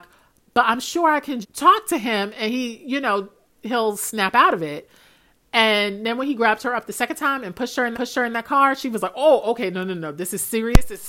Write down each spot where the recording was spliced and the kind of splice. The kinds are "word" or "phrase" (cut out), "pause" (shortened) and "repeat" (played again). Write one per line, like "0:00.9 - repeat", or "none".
0:01.4 - word
0:07.9 - repeat